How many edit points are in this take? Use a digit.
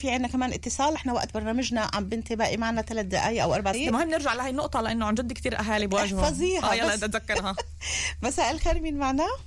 2